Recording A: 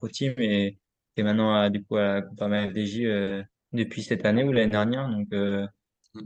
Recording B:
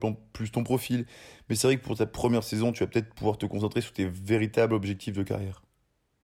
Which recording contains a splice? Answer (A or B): A